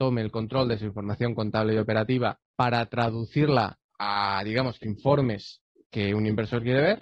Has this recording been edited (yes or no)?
yes